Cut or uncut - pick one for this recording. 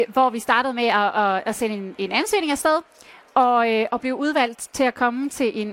uncut